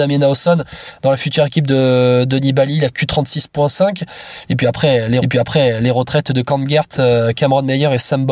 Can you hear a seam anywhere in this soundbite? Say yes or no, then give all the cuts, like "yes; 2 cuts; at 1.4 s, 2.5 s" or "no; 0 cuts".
yes; 1 cut; at 5.2 s